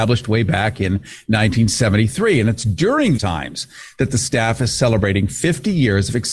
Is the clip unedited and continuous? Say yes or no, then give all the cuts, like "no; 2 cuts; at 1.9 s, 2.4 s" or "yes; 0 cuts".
no; 1 cut; at 3.2 s